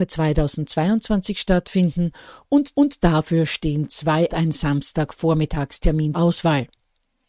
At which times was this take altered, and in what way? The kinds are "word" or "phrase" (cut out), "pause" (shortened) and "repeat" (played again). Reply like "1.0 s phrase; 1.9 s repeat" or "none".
2.7 s repeat; 4.3 s phrase; 6.1 s word